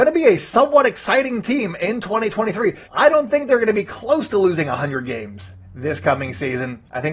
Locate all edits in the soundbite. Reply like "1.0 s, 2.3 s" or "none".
2.8 s